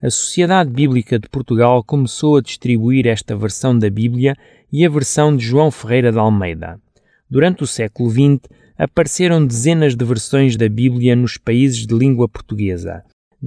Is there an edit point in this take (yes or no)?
no